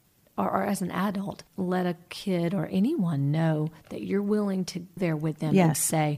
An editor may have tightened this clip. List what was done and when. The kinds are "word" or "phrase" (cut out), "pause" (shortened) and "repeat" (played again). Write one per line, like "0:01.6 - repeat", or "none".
0:01.5 - pause
0:05.0 - word